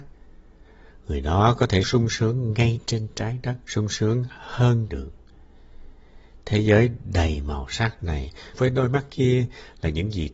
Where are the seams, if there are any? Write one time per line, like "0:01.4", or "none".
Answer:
0:01.8
0:03.6
0:04.9
0:08.5

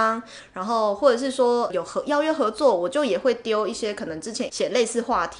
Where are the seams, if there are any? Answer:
0:01.7
0:04.5

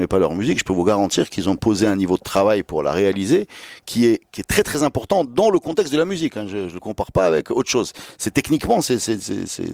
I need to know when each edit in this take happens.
none

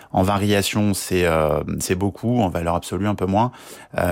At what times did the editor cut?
none

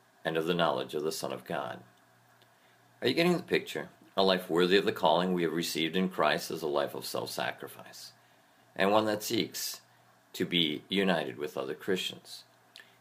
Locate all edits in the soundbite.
0:04.0

